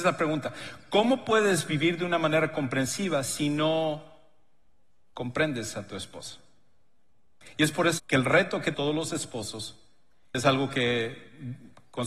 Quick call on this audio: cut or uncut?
cut